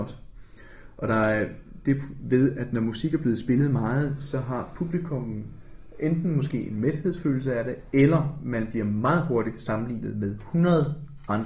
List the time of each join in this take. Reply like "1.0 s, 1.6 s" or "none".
none